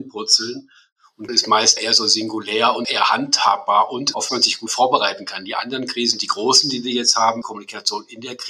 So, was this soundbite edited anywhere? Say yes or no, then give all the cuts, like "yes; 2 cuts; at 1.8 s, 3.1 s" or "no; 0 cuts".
yes; 5 cuts; at 1.3 s, 1.8 s, 2.8 s, 4.3 s, 7.4 s